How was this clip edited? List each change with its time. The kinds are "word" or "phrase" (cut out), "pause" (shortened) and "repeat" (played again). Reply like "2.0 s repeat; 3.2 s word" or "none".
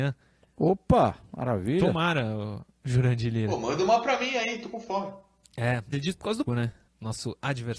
1.3 s pause; 5.9 s word; 6.5 s word; 6.9 s pause